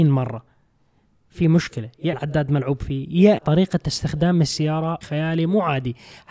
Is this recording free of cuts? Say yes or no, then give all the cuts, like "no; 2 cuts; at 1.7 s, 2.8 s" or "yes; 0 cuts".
no; 3 cuts; at 2.1 s, 3.4 s, 5.0 s